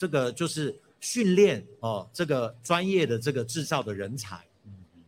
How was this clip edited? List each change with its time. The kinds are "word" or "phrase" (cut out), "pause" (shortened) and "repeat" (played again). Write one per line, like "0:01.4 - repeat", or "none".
0:01.8 - word